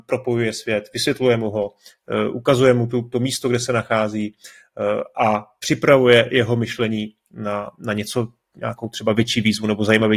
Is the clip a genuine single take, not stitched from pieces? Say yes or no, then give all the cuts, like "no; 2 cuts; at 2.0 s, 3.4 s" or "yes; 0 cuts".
yes; 0 cuts